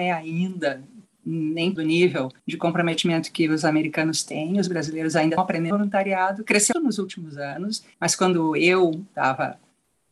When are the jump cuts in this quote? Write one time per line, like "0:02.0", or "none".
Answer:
0:01.8
0:02.4
0:05.4
0:05.7
0:06.7
0:07.9